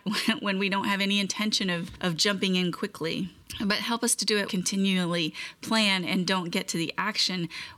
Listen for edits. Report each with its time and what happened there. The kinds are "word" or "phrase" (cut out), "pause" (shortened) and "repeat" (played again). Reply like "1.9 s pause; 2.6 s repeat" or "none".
4.5 s phrase